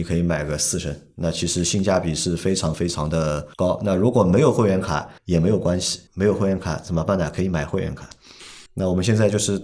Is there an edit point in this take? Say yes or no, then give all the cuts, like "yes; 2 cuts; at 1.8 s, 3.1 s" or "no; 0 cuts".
yes; 4 cuts; at 3.5 s, 5.2 s, 6.1 s, 8.7 s